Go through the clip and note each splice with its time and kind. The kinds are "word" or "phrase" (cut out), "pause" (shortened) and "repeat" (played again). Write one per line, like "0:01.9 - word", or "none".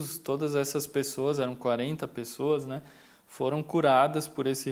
none